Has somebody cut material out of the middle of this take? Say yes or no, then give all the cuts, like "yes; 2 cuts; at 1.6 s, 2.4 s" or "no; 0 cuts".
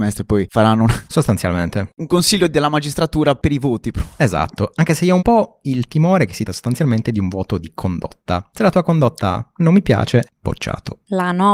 yes; 3 cuts; at 5.2 s, 6.5 s, 10.3 s